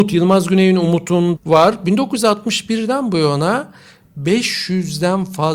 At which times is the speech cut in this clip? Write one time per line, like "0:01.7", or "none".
0:01.4